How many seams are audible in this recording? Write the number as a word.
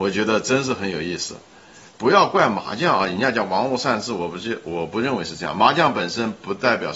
one